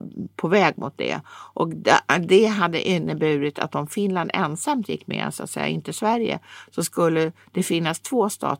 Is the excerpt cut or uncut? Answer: uncut